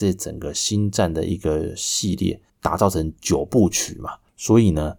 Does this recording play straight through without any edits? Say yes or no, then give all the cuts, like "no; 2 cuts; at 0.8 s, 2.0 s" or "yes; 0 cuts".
no; 1 cut; at 2.5 s